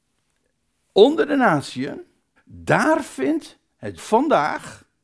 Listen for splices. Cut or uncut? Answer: cut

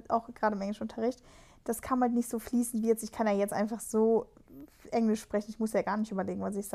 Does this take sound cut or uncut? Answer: uncut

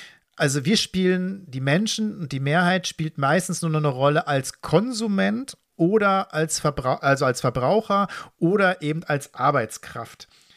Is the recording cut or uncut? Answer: uncut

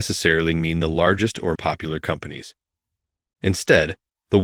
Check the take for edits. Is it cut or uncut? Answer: cut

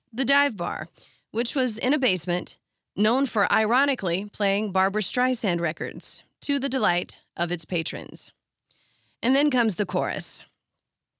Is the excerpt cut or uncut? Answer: uncut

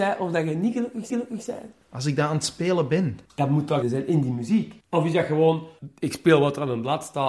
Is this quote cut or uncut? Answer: cut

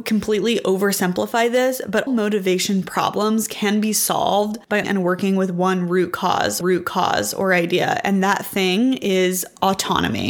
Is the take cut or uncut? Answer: cut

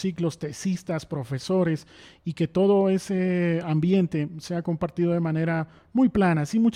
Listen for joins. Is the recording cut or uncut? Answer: uncut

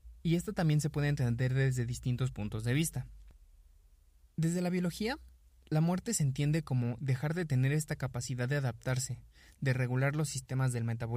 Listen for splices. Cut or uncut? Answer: uncut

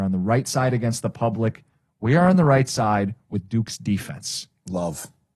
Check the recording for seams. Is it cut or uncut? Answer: uncut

